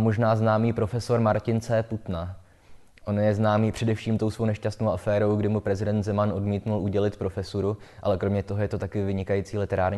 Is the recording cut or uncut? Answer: uncut